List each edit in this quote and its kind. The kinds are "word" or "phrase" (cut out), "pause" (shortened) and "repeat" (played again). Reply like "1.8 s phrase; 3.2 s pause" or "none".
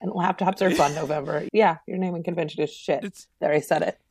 1.5 s word